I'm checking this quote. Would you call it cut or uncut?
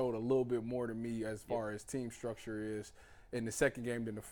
uncut